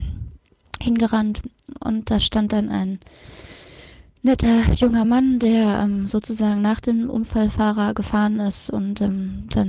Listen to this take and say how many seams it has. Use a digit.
0